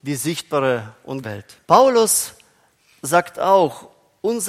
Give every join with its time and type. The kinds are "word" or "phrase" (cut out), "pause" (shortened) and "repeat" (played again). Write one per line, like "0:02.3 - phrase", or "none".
0:01.2 - word
0:01.6 - pause

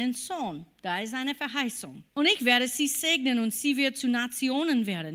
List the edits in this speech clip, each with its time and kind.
0:02.1 - pause

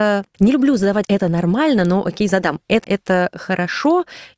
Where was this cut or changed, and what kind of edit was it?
0:01.0 - word
0:02.8 - word

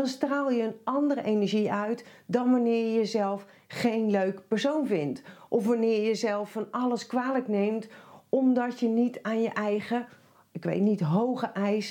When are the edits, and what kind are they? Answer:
none

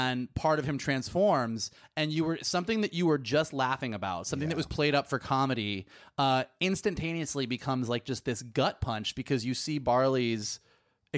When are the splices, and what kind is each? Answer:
none

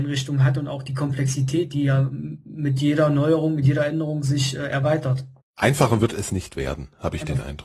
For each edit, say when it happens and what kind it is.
0:05.4 - pause

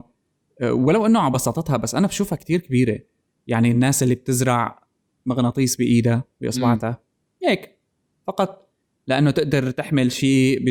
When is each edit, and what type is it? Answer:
none

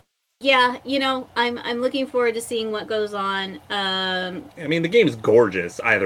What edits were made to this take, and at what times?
0:04.5 - pause

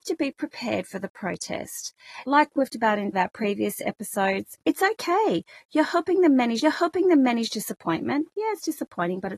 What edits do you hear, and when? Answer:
0:02.3 - word
0:02.7 - word
0:03.1 - phrase
0:04.6 - pause
0:06.6 - repeat

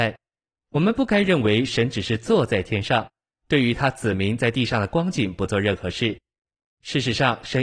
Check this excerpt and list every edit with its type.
none

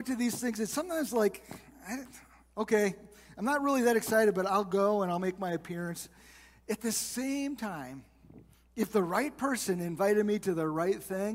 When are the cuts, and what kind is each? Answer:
none

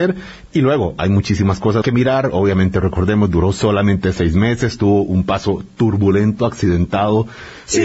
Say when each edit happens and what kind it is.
0:01.8 - word

